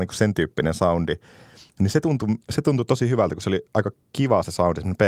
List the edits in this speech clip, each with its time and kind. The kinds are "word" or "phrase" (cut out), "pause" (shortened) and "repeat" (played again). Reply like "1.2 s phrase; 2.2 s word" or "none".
2.4 s pause